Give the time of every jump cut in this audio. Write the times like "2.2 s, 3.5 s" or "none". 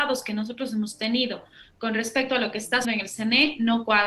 2.8 s